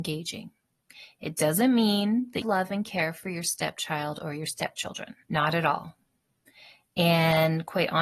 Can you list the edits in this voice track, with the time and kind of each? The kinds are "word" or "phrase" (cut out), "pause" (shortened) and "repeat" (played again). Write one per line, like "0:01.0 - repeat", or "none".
0:02.4 - phrase
0:05.2 - pause